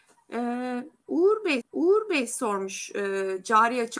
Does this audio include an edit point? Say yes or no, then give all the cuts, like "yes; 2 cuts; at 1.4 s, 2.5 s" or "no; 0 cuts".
yes; 1 cut; at 1.6 s